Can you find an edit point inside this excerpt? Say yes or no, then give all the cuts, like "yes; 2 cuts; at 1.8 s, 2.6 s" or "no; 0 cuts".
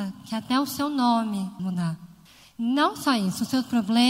yes; 2 cuts; at 1.6 s, 2.3 s